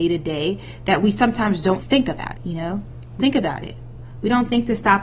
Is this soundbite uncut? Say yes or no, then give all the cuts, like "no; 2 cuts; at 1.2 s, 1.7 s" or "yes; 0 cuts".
no; 3 cuts; at 1.8 s, 2.4 s, 3.2 s